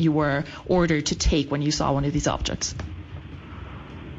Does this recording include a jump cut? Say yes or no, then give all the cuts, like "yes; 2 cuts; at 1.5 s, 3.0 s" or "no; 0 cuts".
no; 0 cuts